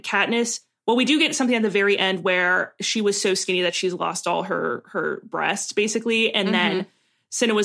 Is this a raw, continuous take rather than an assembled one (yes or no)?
yes